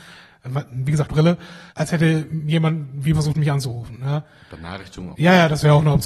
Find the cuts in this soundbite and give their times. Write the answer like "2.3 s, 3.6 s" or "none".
1.1 s, 1.7 s, 3.1 s, 5.1 s